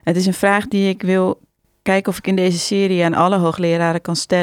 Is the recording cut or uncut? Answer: uncut